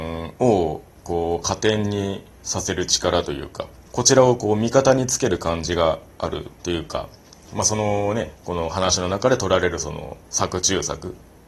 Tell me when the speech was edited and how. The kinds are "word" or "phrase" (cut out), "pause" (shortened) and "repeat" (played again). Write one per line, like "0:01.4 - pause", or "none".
0:06.6 - pause
0:08.3 - pause
0:10.2 - pause